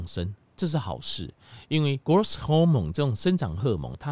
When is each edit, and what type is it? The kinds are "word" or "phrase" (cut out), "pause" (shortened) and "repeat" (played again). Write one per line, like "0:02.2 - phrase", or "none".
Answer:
0:02.0 - pause